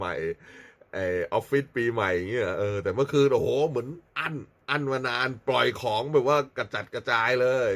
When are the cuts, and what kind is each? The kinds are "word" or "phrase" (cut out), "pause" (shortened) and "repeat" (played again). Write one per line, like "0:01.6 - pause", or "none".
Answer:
0:04.1 - pause
0:04.6 - pause